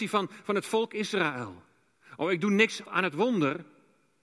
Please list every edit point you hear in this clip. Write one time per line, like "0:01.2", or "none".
0:02.8